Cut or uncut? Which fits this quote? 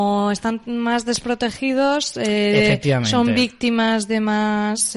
uncut